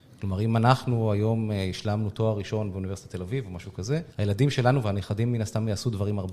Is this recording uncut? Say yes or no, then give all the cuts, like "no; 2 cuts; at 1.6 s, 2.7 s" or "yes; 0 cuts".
no; 1 cut; at 4.1 s